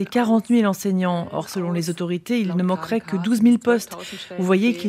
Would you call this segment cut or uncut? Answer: uncut